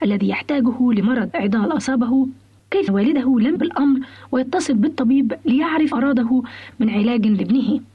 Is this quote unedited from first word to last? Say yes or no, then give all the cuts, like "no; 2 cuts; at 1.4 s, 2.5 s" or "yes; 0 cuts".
no; 3 cuts; at 2.9 s, 3.6 s, 5.9 s